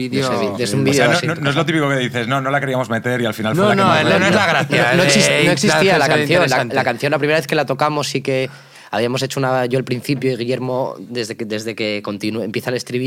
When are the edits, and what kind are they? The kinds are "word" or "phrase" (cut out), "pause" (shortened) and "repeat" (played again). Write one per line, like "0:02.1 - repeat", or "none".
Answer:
none